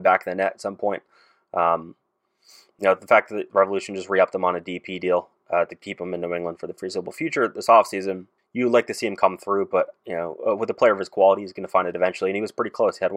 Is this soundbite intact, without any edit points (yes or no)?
no